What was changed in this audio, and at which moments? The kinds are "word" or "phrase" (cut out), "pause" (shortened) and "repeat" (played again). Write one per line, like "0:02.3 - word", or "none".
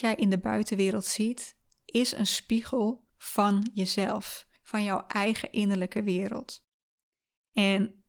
0:03.1 - pause
0:04.6 - pause